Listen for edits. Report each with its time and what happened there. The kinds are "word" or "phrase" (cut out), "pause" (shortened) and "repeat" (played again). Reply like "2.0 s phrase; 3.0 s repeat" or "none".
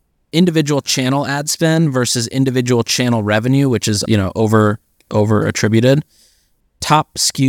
4.1 s word